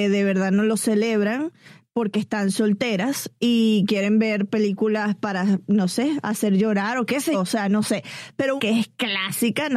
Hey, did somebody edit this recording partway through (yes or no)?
yes